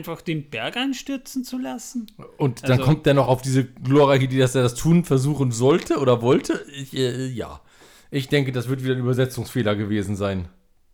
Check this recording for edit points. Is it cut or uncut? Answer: uncut